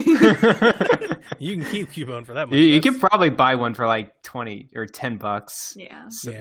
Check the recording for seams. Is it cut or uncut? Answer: uncut